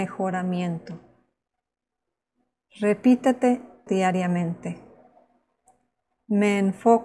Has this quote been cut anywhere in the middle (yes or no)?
yes